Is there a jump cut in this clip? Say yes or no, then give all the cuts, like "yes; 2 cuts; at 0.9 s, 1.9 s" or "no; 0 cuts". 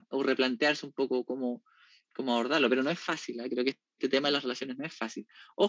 no; 0 cuts